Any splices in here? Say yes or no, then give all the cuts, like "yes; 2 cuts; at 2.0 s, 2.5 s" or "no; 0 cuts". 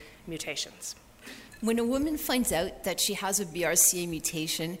no; 0 cuts